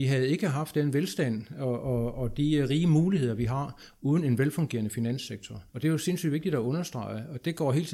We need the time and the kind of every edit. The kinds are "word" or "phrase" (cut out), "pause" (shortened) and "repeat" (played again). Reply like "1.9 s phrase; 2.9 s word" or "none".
5.7 s pause